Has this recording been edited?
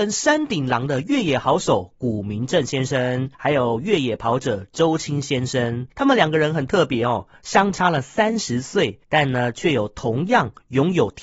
yes; 3 cuts; at 3.3 s, 5.9 s, 9.0 s

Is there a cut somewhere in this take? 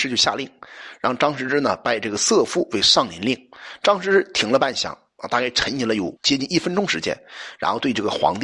yes; 1 cut; at 6.2 s

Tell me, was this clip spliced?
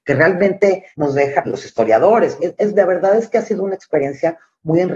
yes; 3 cuts; at 0.9 s, 1.4 s, 2.4 s

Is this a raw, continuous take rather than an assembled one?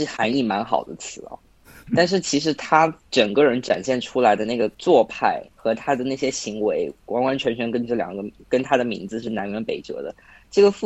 no; 3 cuts; at 3.0 s, 4.7 s, 5.5 s

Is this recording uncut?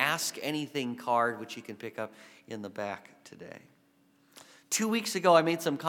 yes; 0 cuts

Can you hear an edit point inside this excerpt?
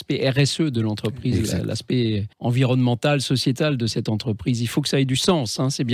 yes; 1 cut; at 2.3 s

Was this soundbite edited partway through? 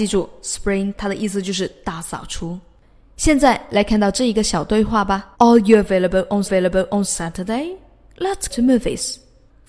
yes; 4 cuts; at 0.9 s, 5.3 s, 6.4 s, 8.5 s

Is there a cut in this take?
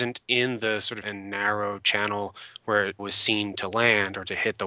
yes; 2 cuts; at 1.0 s, 3.0 s

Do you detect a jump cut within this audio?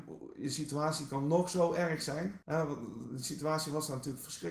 yes; 1 cut; at 2.4 s

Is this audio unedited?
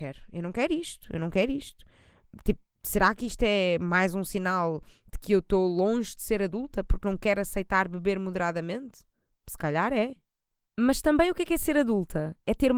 yes; 0 cuts

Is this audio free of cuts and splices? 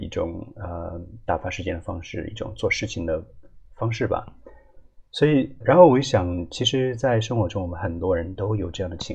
no; 2 cuts; at 5.1 s, 5.6 s

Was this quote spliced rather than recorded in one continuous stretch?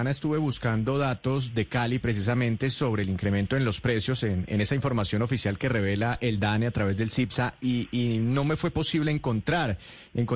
no; 0 cuts

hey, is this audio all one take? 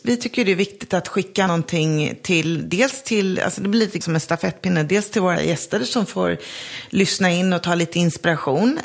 no; 3 cuts; at 1.5 s, 4.0 s, 5.4 s

